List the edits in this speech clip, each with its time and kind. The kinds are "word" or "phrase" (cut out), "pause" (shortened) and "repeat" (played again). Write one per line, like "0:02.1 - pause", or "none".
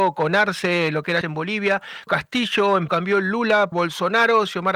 0:01.2 - word
0:02.1 - word
0:02.9 - word
0:03.7 - word

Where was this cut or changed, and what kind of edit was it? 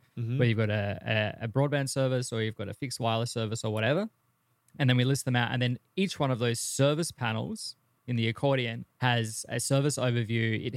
0:08.9 - pause

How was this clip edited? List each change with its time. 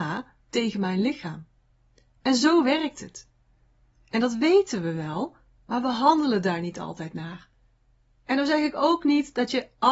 none

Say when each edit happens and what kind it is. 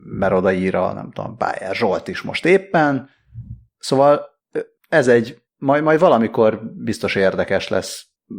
none

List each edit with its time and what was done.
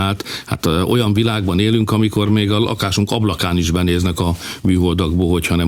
none

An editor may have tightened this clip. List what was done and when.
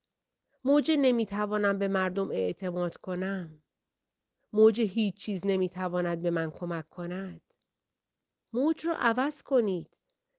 none

